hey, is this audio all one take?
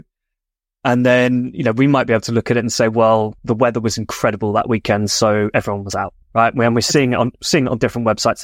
no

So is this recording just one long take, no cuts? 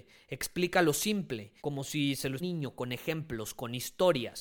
no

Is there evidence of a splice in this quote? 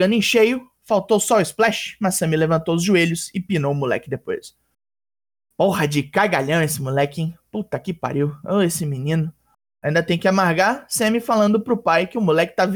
no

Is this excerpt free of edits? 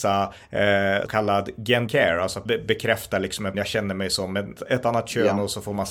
no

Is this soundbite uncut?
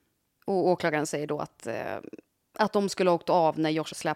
yes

